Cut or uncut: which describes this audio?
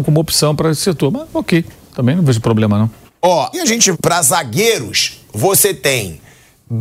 cut